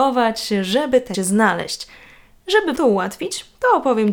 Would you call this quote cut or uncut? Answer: cut